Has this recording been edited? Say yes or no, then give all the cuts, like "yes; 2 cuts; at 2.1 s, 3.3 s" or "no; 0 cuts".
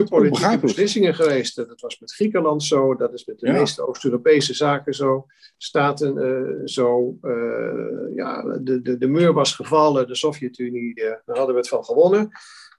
yes; 1 cut; at 11.0 s